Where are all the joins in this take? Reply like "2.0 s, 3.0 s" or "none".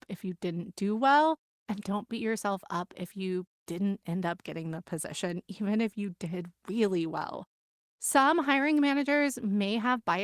none